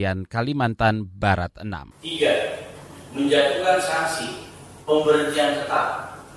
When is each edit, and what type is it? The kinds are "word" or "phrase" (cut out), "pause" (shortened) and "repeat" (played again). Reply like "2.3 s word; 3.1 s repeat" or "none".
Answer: 1.9 s pause

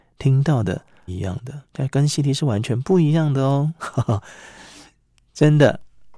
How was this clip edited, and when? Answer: 1.1 s phrase; 1.6 s pause

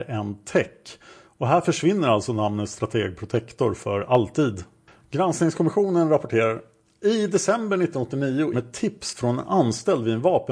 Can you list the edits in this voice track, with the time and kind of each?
8.5 s word

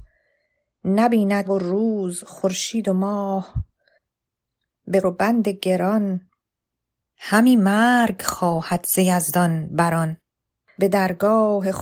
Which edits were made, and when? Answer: 1.5 s word; 5.0 s phrase

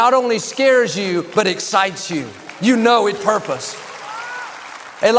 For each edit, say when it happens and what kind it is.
3.2 s word

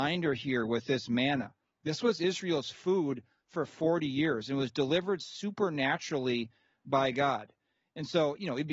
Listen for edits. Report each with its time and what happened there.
none

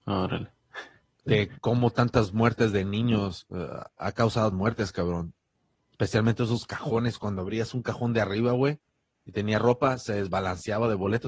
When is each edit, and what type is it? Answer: 4.5 s word

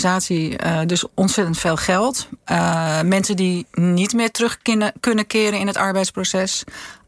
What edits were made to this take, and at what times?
none

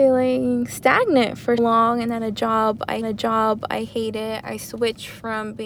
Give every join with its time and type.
1.6 s word; 3.0 s repeat

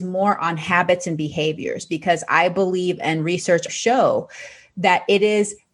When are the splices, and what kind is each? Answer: 3.7 s word

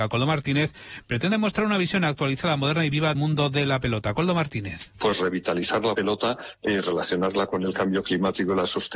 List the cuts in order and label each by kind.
3.1 s word

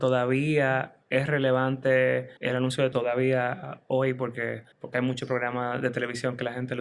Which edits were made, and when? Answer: 1.0 s pause; 2.4 s pause; 2.9 s word; 4.7 s pause

